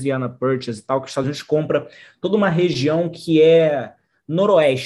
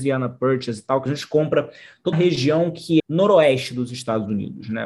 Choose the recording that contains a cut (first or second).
second